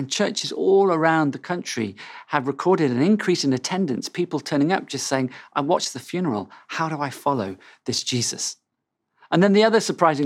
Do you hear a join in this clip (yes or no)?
no